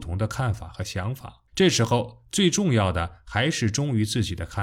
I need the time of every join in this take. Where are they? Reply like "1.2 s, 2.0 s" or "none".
1.5 s

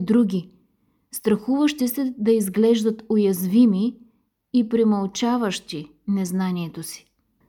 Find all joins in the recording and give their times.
none

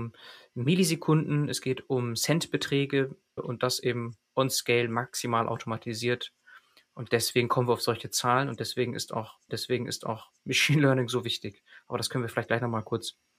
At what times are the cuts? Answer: 3.4 s, 9.5 s

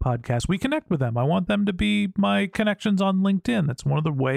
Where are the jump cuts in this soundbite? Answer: none

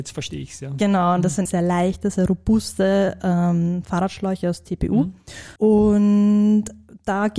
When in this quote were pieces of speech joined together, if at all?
1.5 s, 5.6 s

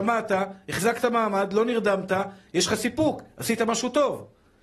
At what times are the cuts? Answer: none

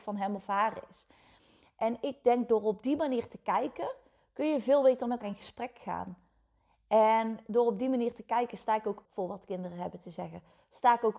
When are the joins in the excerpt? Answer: 5.2 s, 9.0 s

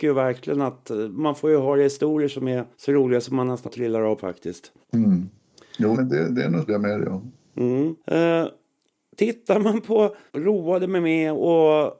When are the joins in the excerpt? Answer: 2.7 s, 3.7 s, 4.2 s, 4.8 s, 5.9 s, 6.7 s, 8.0 s, 10.3 s

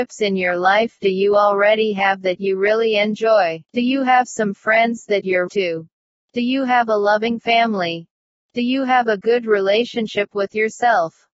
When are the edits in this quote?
3.6 s, 5.5 s

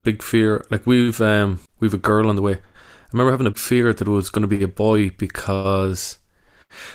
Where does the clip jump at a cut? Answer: 1.7 s, 3.5 s

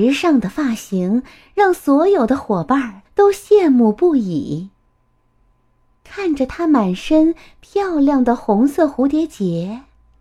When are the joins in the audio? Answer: 3.1 s

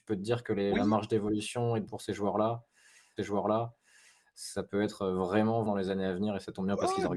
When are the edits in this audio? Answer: 1.9 s, 3.2 s, 5.7 s

